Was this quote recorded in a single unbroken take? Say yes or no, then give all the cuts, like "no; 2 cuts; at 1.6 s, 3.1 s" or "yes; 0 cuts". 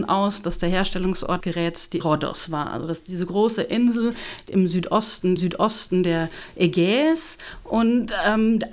no; 3 cuts; at 1.4 s, 2.0 s, 5.4 s